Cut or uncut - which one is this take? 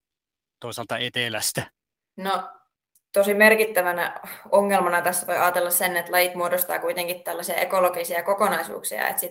uncut